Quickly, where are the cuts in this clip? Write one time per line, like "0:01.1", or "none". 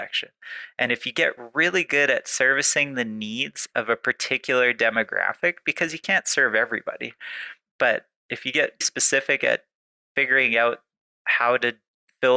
0:08.8

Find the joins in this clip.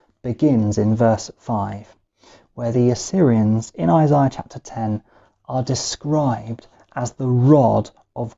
none

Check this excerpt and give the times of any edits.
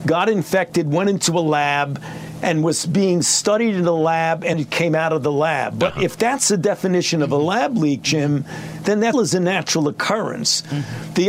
0:04.5
0:09.1

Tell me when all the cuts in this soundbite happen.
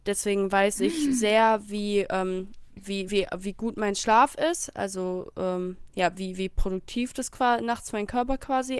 none

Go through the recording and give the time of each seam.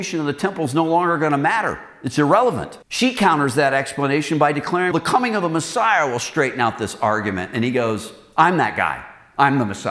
0:02.8
0:04.9

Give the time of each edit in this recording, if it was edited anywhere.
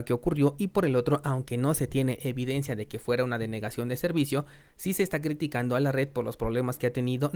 none

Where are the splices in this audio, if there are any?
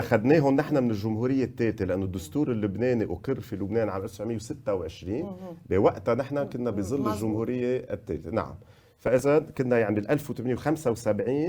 none

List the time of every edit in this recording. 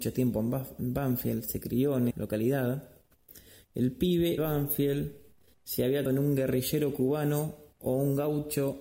0:02.1
0:04.4
0:06.1

